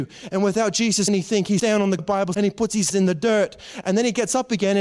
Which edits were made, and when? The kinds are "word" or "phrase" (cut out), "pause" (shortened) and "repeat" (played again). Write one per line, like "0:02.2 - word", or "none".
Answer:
0:01.1 - word
0:01.6 - word
0:02.0 - word
0:02.3 - word
0:02.9 - word

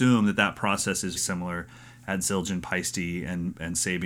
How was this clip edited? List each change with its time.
0:01.2 - word

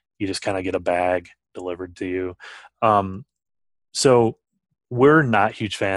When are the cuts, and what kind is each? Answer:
none

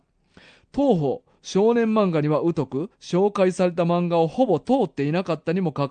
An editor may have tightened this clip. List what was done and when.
0:02.9 - pause

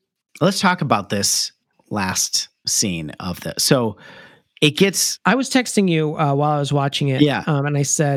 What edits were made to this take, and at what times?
none

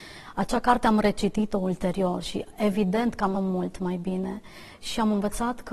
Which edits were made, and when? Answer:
0:03.3 - word

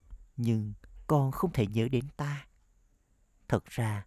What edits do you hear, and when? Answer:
none

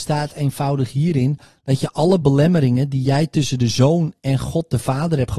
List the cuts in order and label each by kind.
none

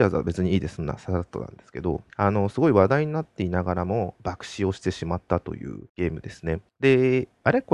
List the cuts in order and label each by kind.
0:02.1 - pause
0:05.9 - pause
0:06.7 - pause

